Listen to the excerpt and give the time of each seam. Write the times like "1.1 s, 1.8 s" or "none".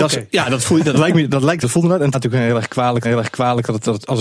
1.6 s, 2.1 s, 3.0 s

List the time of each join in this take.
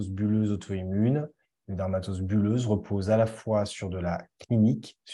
none

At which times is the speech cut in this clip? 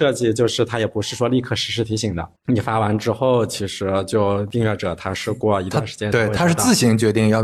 2.3 s

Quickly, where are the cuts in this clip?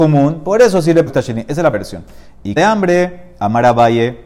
1.1 s, 1.7 s, 2.6 s

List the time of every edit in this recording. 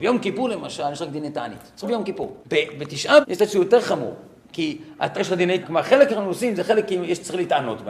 1.8 s, 2.4 s, 3.2 s, 4.4 s, 5.1 s, 5.6 s, 6.1 s

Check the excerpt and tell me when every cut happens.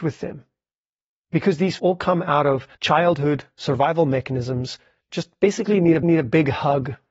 1.8 s, 2.7 s, 5.0 s, 6.0 s

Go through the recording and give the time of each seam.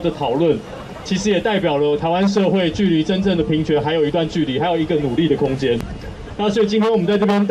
1.0 s

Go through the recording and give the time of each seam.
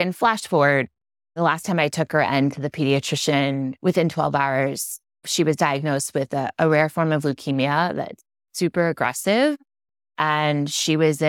none

